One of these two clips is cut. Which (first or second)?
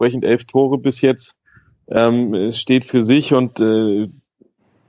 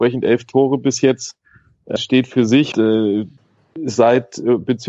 second